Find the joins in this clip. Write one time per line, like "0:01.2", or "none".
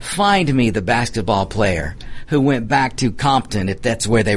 none